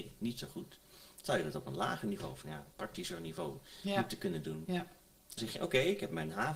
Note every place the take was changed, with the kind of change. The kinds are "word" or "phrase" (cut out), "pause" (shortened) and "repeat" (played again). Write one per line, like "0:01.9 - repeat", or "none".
0:02.7 - pause
0:05.4 - word